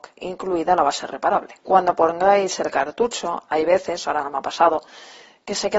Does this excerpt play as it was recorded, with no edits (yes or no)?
yes